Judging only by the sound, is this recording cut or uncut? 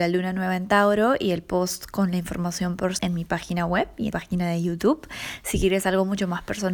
cut